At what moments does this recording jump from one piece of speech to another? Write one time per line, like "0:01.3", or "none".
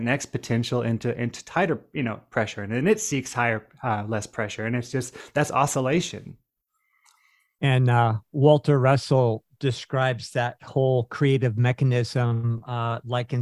none